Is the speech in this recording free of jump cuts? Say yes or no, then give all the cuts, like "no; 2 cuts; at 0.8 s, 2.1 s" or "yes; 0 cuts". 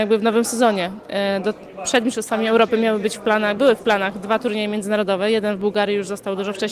yes; 0 cuts